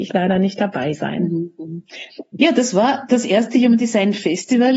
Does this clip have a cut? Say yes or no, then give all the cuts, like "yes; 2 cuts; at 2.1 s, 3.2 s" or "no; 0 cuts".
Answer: no; 0 cuts